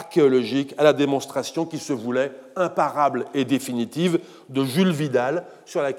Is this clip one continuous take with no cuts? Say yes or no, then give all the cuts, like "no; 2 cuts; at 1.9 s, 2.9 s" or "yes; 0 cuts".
yes; 0 cuts